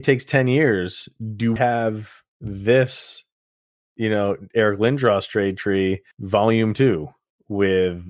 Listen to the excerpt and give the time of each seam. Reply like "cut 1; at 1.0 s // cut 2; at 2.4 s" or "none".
cut 1; at 1.6 s // cut 2; at 6.1 s